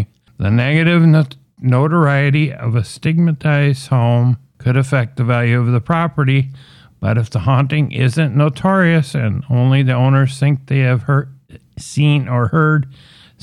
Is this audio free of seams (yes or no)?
yes